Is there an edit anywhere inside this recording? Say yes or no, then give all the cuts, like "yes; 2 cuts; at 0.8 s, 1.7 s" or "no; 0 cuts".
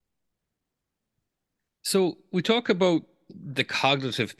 no; 0 cuts